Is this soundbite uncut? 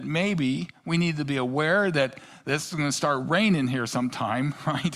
yes; 0 cuts

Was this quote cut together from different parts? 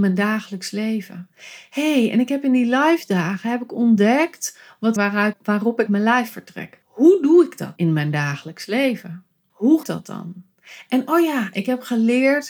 yes; 6 cuts; at 5.0 s, 5.3 s, 5.9 s, 6.8 s, 7.8 s, 9.8 s

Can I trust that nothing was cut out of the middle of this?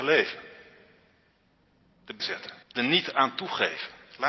no; 2 cuts; at 2.2 s, 2.6 s

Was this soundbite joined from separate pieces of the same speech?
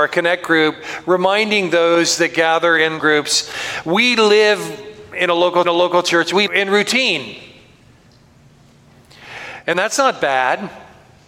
yes; 3 cuts; at 3.0 s, 5.6 s, 6.5 s

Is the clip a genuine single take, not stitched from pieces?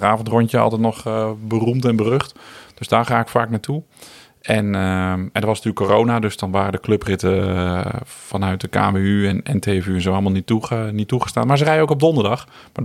yes; 0 cuts

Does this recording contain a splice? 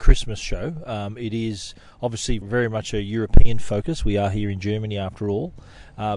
yes; 1 cut; at 2.4 s

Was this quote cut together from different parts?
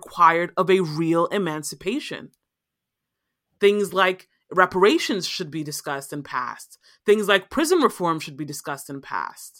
no; 0 cuts

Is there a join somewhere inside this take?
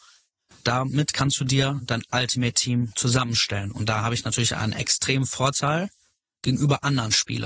no; 0 cuts

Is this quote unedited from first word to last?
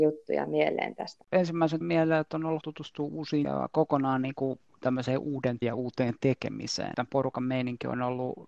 no; 4 cuts; at 1.8 s, 2.6 s, 3.4 s, 5.6 s

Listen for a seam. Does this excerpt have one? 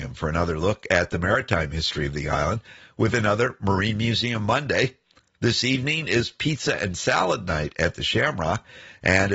no; 0 cuts

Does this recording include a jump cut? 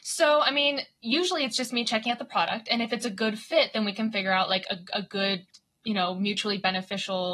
no; 0 cuts

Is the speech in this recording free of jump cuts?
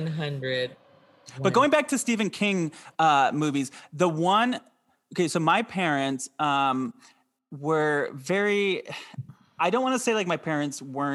yes; 0 cuts

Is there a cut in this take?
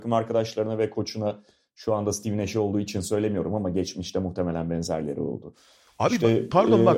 no; 0 cuts

